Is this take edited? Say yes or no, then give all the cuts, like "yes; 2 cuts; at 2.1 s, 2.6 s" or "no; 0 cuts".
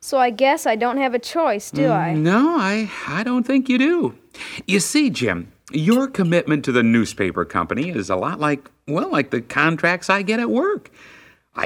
no; 0 cuts